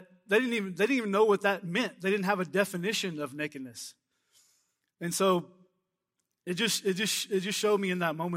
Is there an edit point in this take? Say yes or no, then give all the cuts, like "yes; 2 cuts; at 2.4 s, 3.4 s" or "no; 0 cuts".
no; 0 cuts